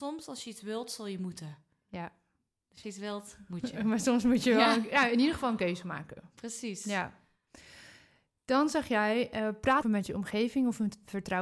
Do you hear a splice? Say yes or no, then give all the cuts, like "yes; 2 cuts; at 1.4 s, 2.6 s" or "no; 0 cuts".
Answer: yes; 2 cuts; at 2.8 s, 9.8 s